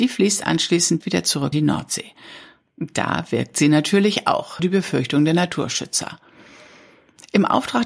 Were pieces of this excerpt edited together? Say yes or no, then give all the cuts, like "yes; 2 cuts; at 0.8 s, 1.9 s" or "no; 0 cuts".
yes; 3 cuts; at 1.0 s, 1.5 s, 4.6 s